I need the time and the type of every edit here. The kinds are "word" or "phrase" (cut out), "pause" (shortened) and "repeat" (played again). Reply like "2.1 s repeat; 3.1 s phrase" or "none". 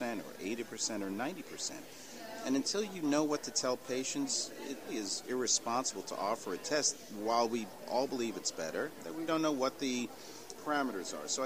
4.9 s word; 9.3 s word